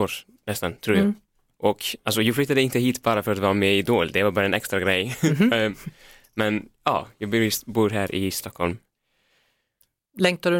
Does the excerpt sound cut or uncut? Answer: uncut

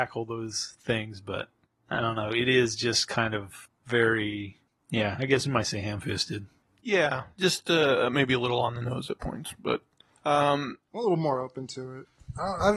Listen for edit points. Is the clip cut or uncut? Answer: uncut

